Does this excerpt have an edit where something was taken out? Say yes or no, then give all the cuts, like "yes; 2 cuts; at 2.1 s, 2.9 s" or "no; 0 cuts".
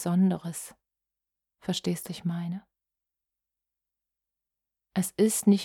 yes; 1 cut; at 2.1 s